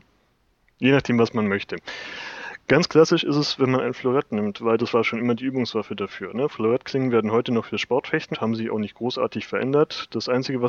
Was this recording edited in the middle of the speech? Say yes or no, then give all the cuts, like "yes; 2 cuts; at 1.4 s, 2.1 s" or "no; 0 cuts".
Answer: yes; 2 cuts; at 4.9 s, 8.3 s